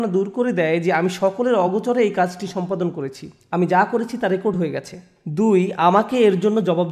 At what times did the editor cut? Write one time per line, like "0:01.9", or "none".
none